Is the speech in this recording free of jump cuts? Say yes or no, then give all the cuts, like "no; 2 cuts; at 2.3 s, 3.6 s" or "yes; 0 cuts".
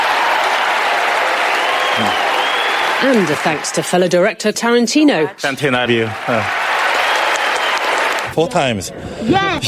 no; 2 cuts; at 4.5 s, 5.9 s